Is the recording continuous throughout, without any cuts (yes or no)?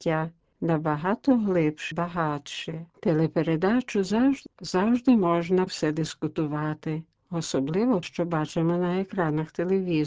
no